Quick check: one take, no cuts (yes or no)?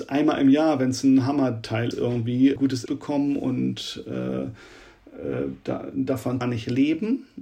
no